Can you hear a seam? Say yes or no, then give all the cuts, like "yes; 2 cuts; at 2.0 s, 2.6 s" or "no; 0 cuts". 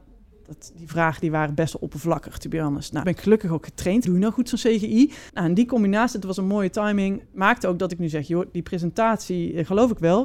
yes; 4 cuts; at 3.0 s, 4.0 s, 5.3 s, 7.3 s